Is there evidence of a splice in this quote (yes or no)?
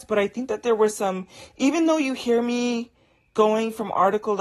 no